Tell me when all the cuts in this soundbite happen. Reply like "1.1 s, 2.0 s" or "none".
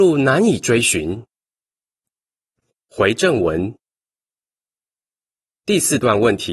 none